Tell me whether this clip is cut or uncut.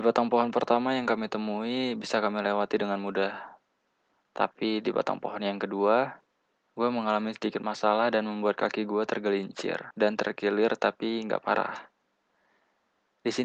uncut